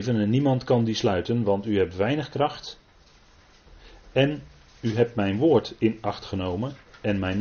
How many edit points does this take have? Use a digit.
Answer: 0